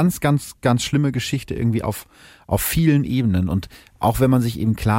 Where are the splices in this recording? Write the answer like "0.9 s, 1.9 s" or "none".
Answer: none